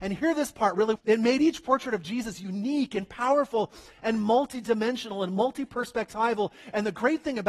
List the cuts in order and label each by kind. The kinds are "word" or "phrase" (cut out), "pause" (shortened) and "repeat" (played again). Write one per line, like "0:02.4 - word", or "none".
0:01.0 - word